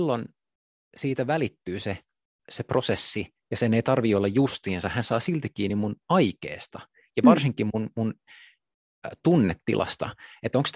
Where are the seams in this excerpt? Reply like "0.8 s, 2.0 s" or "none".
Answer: none